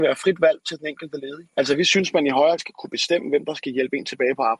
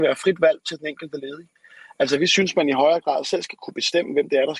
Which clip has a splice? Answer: first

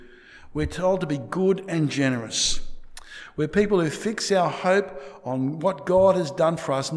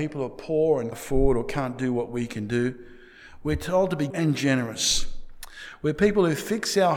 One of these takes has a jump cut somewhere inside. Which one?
second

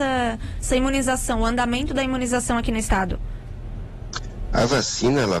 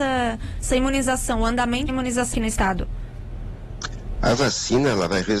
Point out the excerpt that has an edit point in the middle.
second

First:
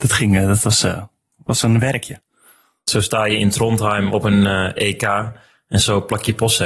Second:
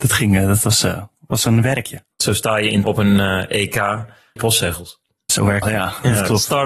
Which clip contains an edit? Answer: second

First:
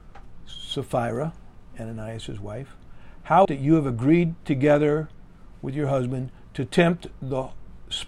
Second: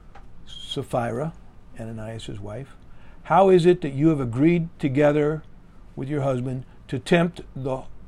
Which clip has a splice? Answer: first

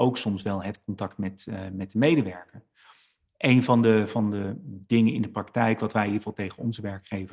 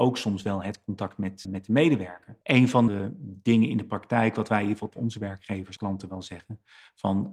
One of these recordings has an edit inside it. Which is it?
second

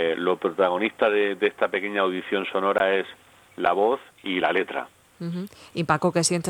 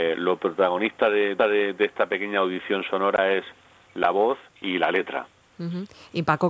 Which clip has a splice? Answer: second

